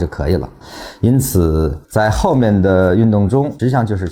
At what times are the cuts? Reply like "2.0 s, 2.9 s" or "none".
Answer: 1.8 s